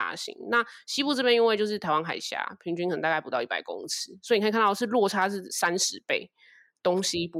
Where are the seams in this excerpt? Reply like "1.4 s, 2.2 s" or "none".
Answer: none